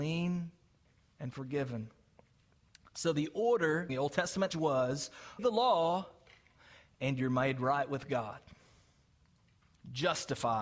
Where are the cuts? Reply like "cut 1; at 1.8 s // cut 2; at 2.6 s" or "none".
cut 1; at 3.9 s // cut 2; at 4.5 s // cut 3; at 5.4 s